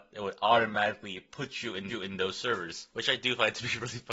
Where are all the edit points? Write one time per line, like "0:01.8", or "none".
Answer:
0:01.9
0:02.9

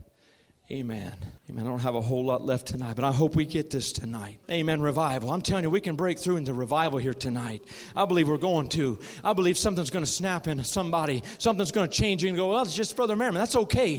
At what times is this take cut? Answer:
0:01.4
0:04.4

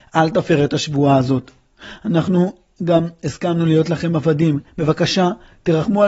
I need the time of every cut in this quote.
0:04.7

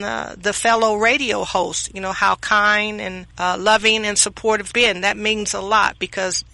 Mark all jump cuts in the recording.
0:03.3
0:04.7

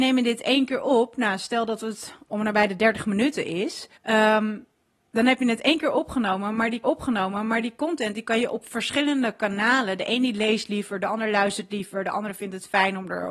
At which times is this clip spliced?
0:04.0
0:06.8

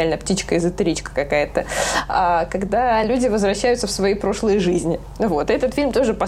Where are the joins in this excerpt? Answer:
none

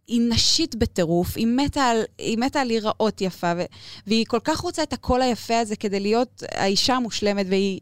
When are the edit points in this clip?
none

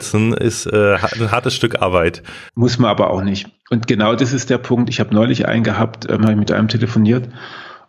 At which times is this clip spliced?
0:02.5

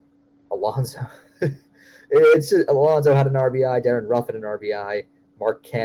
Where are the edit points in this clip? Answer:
none

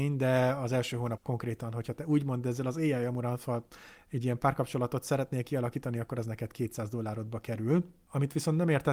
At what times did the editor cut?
0:01.2

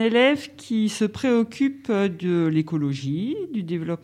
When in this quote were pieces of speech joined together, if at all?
none

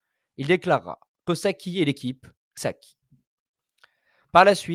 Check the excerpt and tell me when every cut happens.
0:01.3
0:02.6

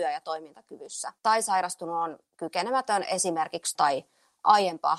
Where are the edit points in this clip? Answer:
0:01.2
0:03.8

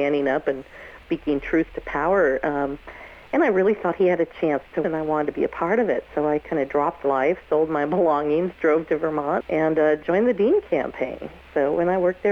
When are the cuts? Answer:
0:01.0
0:04.8
0:07.0
0:09.4

